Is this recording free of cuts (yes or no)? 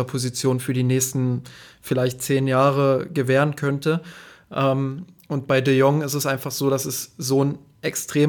yes